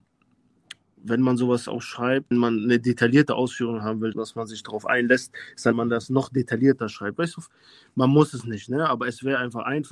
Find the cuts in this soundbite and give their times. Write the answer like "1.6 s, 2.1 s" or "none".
2.3 s, 4.1 s, 5.7 s